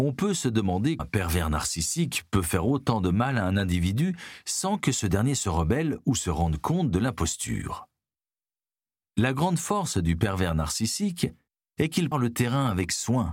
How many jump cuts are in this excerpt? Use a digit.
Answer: 2